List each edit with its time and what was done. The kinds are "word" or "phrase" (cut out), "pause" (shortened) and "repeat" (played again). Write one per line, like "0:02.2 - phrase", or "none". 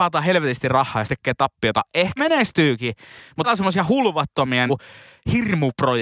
0:01.1 - word
0:02.2 - word
0:03.4 - word
0:04.7 - word